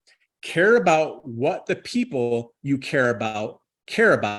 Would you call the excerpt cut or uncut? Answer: uncut